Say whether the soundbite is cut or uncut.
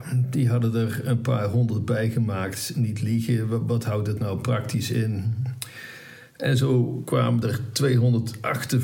uncut